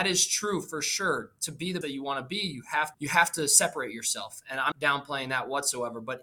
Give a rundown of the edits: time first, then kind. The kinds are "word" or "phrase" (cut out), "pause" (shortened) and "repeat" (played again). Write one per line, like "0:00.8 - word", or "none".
0:01.8 - word
0:02.9 - word
0:04.7 - word